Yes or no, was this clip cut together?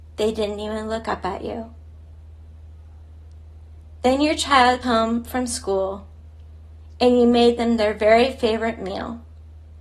yes